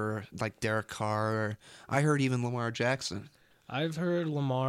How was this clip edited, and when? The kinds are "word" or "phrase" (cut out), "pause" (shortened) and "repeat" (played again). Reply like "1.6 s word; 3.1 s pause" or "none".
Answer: none

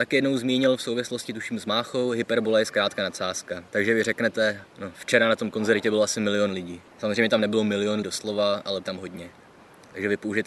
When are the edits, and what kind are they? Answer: 3.7 s pause; 4.7 s pause; 6.9 s pause; 8.0 s word; 8.8 s phrase

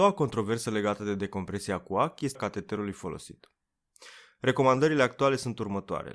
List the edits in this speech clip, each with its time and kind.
2.3 s word

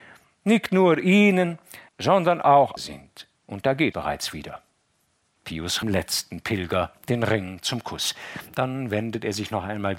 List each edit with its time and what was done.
1.9 s pause; 2.8 s phrase; 3.4 s pause; 3.9 s word; 5.8 s phrase

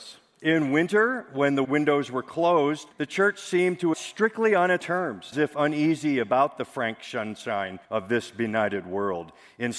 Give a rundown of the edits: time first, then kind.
1.6 s word; 2.9 s pause; 3.9 s phrase; 4.8 s word; 5.3 s word; 7.8 s pause

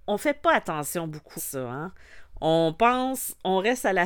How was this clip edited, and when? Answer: 1.4 s word

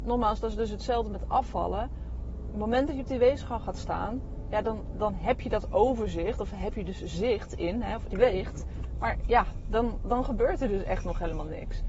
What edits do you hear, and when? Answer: 8.1 s phrase

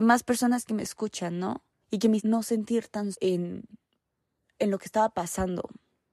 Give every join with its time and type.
1.8 s pause; 2.2 s word; 3.1 s word

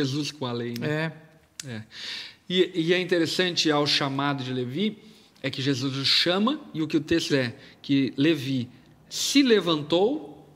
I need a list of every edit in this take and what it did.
7.3 s word

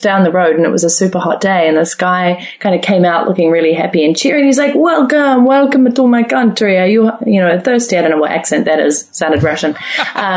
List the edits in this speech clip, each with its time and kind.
none

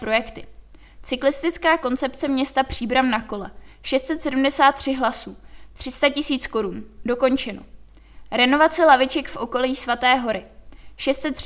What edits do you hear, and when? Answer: none

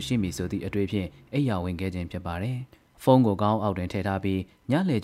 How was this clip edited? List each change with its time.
2.7 s pause

